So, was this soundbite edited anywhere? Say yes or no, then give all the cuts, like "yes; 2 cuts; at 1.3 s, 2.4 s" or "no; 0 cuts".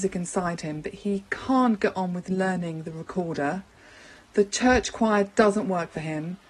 no; 0 cuts